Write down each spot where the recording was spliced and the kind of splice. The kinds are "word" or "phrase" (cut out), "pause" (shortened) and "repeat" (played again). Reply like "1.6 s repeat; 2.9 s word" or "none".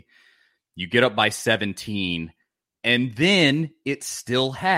none